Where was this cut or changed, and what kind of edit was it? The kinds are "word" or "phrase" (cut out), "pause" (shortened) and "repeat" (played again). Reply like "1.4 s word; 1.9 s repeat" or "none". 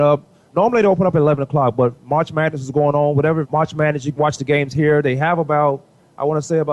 3.4 s phrase; 4.2 s word